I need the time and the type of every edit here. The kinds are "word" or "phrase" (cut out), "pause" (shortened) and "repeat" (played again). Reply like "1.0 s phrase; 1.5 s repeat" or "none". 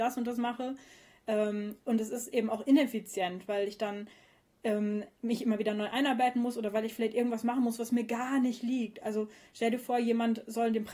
none